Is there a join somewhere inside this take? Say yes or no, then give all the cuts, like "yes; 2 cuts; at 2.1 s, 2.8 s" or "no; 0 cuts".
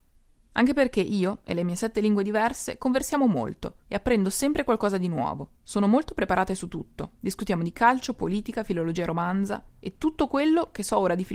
yes; 4 cuts; at 3.8 s, 5.6 s, 7.1 s, 9.7 s